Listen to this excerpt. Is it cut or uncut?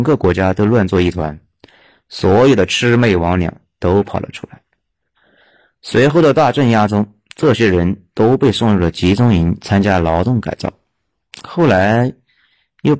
uncut